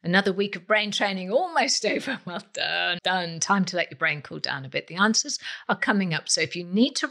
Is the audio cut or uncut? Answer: cut